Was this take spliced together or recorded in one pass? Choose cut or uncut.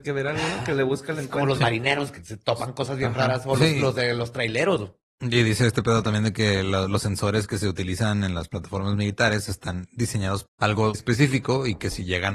cut